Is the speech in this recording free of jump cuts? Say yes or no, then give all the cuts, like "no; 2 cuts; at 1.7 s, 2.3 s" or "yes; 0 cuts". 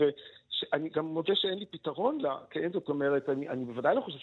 yes; 0 cuts